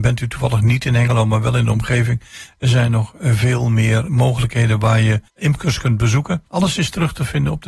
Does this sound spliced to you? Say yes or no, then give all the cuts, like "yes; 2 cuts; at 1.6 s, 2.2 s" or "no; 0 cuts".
yes; 3 cuts; at 4.1 s, 5.3 s, 6.5 s